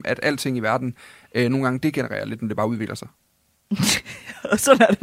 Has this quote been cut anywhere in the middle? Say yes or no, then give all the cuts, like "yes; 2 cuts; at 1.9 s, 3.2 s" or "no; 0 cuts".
no; 0 cuts